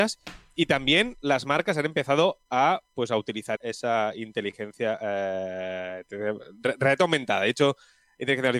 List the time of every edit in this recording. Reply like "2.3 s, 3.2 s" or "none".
3.6 s